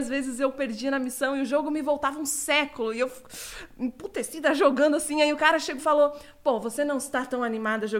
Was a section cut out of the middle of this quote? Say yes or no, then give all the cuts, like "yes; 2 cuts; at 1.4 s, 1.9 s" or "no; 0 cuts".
yes; 1 cut; at 5.8 s